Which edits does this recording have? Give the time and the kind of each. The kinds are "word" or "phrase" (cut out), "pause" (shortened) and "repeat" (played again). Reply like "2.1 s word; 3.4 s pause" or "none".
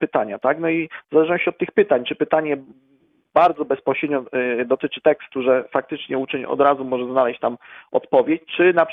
none